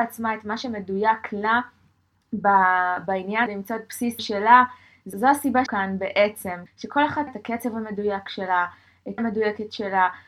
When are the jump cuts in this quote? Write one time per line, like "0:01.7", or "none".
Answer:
0:03.5
0:04.2
0:05.1
0:05.7
0:06.7
0:07.3
0:09.2